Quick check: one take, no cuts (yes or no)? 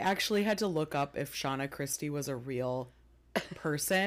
yes